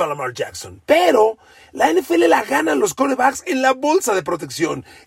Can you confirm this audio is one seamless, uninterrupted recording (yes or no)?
yes